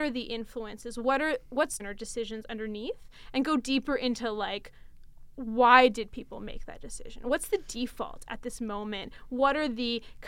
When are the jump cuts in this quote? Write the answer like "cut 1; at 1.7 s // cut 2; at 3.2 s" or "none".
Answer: cut 1; at 1.8 s